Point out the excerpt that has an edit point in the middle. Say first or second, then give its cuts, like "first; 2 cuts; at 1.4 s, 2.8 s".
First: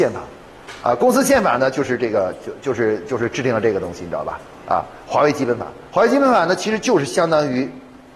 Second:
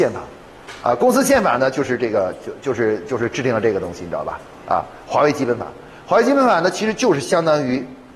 first; 1 cut; at 5.9 s